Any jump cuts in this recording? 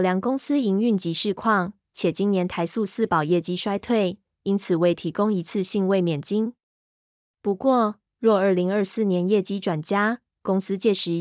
no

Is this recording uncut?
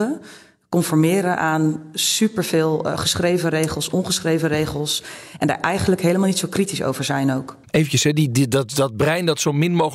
yes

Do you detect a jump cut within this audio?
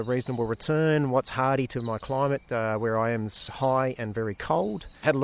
no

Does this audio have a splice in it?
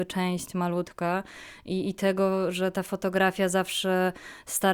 no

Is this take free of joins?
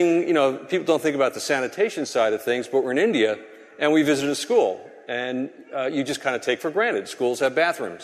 yes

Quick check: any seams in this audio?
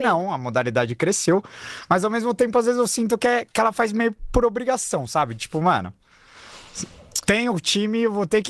no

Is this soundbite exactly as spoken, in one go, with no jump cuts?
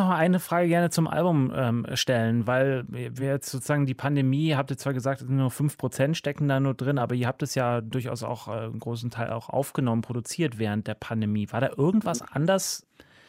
yes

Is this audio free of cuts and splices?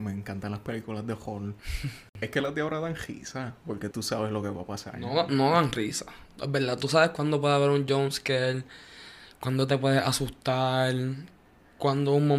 no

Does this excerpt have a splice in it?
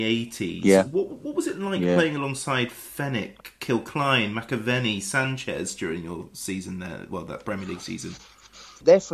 no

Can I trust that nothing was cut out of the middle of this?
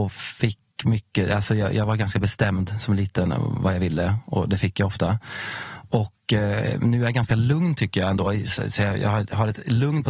yes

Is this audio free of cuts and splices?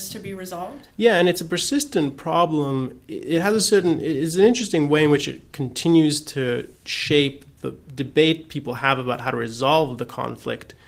yes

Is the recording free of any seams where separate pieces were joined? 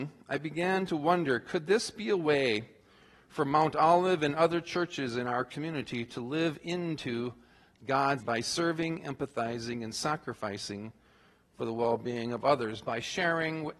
no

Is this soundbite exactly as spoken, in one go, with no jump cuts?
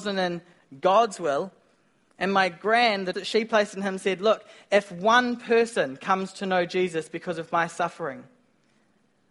no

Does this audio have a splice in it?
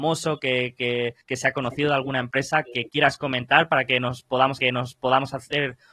yes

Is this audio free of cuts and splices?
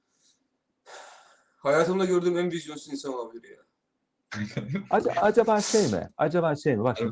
yes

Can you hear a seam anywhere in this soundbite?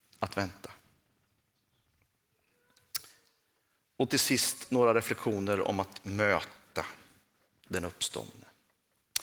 no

